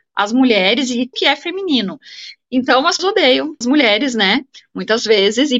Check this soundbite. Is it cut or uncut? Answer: cut